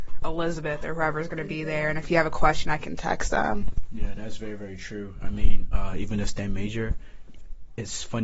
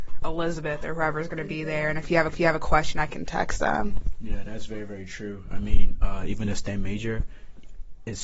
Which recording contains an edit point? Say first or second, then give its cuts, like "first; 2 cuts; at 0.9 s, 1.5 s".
second; 1 cut; at 2.3 s